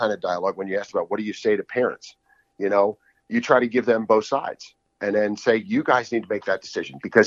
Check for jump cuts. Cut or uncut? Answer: uncut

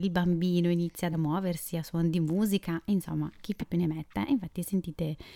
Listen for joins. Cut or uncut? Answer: cut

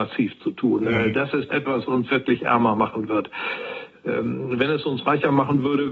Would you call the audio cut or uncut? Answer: cut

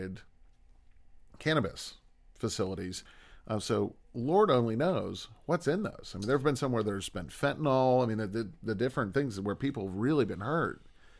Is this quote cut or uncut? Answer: cut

